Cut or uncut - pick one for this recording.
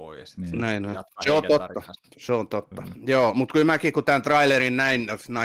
uncut